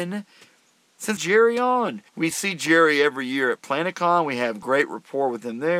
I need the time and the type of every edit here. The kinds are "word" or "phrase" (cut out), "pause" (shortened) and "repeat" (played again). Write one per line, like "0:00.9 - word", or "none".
0:01.2 - phrase
0:02.1 - pause
0:03.9 - word